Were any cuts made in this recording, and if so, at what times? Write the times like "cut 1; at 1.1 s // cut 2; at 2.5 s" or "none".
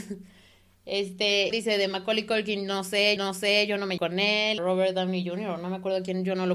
cut 1; at 1.5 s // cut 2; at 3.2 s // cut 3; at 4.0 s // cut 4; at 4.6 s